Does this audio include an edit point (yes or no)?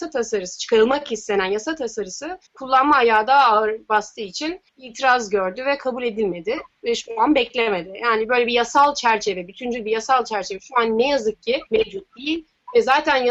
yes